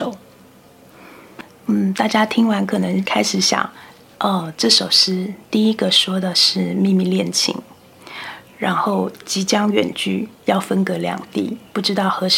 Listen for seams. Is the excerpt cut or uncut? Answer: cut